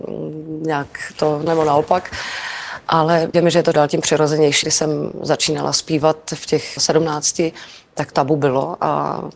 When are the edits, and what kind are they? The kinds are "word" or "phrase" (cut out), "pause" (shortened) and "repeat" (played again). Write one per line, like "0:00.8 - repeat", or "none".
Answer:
0:01.5 - word
0:03.3 - word
0:03.7 - word
0:04.6 - word
0:06.8 - word
0:08.1 - word